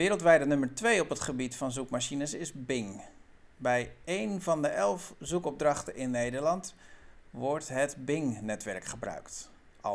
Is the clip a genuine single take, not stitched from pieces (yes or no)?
no